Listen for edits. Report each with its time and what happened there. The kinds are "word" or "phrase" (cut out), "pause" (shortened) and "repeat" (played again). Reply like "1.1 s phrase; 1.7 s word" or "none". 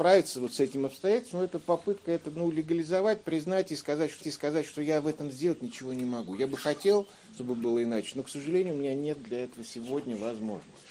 4.2 s repeat